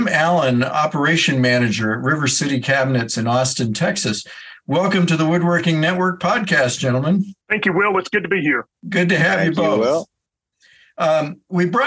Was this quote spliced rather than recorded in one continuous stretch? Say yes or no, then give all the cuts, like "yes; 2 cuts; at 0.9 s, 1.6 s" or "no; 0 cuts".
yes; 2 cuts; at 7.4 s, 8.7 s